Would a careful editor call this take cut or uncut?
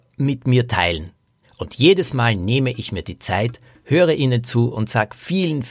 uncut